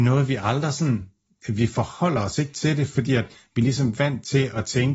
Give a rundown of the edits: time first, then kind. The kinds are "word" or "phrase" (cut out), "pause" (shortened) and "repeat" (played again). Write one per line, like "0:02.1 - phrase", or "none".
none